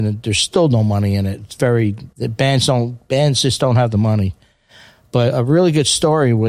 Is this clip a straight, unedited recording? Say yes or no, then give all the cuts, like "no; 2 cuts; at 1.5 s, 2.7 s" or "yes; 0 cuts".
no; 1 cut; at 2.1 s